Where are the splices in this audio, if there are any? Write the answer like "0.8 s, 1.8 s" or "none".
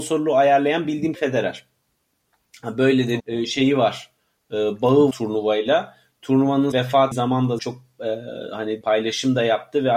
1.1 s, 3.2 s, 5.1 s, 6.7 s, 7.1 s, 7.6 s, 8.8 s